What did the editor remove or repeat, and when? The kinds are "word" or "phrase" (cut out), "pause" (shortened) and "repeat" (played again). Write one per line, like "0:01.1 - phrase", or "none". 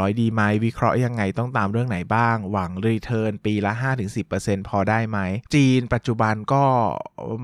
0:05.5 - pause